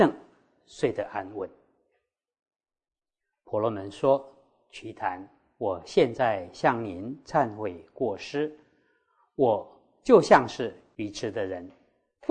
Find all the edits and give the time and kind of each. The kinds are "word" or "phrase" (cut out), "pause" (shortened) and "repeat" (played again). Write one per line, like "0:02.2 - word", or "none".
none